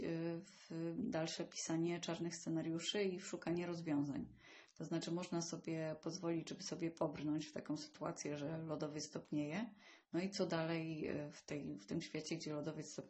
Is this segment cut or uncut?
cut